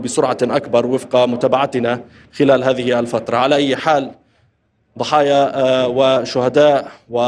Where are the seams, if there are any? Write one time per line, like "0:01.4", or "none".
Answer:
none